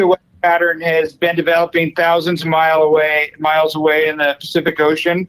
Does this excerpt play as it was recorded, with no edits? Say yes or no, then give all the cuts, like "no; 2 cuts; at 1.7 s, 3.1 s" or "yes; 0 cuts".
yes; 0 cuts